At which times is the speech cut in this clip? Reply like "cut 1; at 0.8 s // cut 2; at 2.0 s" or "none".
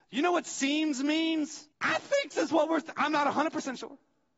cut 1; at 1.7 s // cut 2; at 2.3 s